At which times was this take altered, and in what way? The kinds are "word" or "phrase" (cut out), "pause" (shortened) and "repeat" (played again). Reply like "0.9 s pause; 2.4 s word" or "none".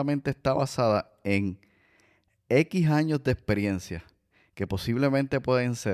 none

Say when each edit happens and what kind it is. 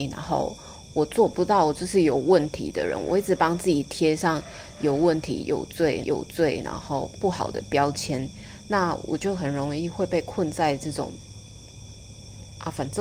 6.0 s repeat

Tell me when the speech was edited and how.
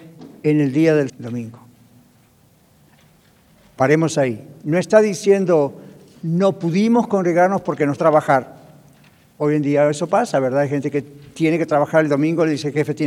1.1 s word; 8.0 s word

